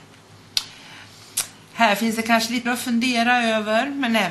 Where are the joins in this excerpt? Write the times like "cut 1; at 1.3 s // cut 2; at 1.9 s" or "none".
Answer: cut 1; at 2.7 s